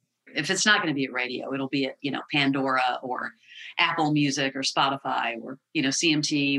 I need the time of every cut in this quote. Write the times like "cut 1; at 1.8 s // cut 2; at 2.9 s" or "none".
none

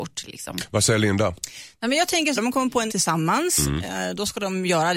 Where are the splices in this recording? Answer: cut 1; at 2.4 s // cut 2; at 2.9 s

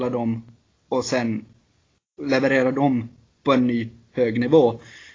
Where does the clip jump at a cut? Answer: none

